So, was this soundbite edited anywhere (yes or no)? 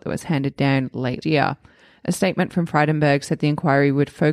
yes